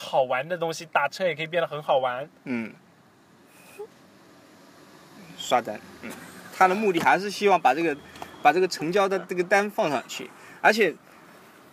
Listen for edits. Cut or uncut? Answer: uncut